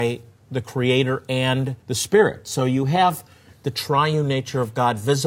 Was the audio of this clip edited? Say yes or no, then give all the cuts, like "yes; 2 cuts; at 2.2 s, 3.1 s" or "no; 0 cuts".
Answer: yes; 1 cut; at 1.8 s